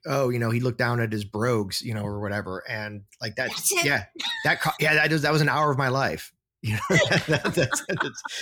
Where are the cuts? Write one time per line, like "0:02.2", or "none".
none